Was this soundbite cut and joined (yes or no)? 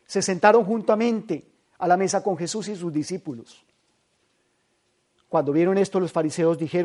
no